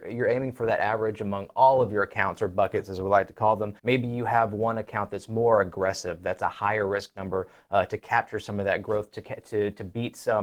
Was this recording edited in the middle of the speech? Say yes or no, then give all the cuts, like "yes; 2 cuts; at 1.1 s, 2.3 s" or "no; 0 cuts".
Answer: yes; 1 cut; at 3.8 s